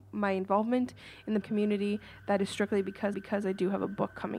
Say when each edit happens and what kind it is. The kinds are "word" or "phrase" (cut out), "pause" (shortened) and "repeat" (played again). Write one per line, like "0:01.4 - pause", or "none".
0:01.4 - word
0:03.1 - repeat

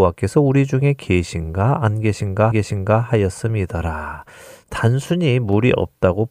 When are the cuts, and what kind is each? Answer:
0:02.5 - repeat

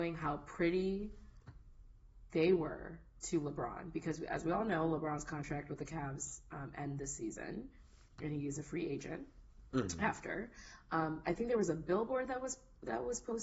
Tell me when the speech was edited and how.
none

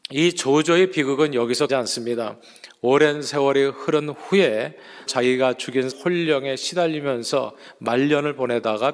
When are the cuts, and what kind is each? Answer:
0:01.7 - word
0:05.1 - word
0:05.9 - word

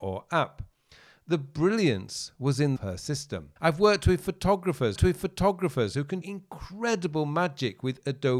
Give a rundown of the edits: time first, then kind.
0:02.8 - phrase
0:03.6 - pause
0:05.0 - repeat
0:06.2 - word

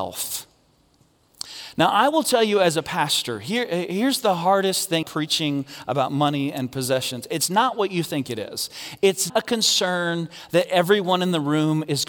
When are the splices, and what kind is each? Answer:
0:05.0 - word
0:09.3 - word

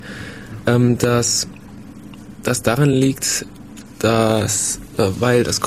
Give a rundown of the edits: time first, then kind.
none

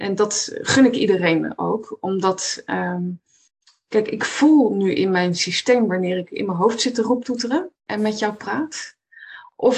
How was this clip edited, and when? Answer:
0:03.5 - pause
0:07.7 - pause

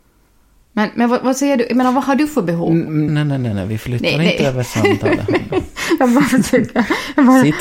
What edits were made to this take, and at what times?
0:03.1 - word

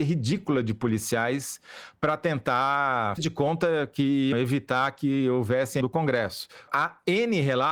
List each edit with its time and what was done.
0:03.2 - word
0:04.3 - word
0:05.8 - word

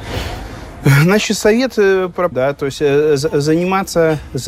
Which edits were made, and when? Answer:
0:02.3 - word

